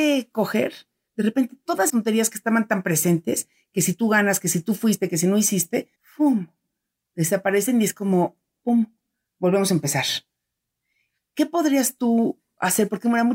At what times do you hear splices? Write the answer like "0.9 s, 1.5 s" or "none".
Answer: 1.9 s, 6.0 s